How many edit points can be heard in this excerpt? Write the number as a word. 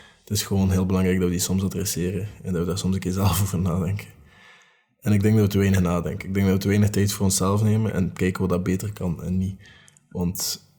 zero